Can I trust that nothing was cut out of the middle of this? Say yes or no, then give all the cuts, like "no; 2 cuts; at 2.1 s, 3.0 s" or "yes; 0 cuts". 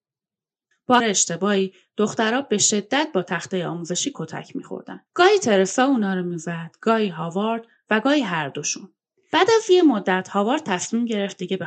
no; 3 cuts; at 1.0 s, 5.1 s, 9.1 s